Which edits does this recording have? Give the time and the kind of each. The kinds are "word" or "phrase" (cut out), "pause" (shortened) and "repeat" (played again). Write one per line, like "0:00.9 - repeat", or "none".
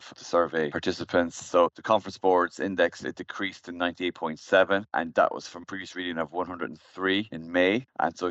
none